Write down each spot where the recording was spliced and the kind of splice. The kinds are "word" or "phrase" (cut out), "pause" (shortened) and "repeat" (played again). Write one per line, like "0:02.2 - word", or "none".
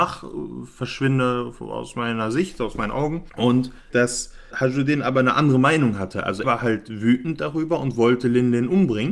0:03.9 - phrase
0:04.5 - word
0:06.4 - word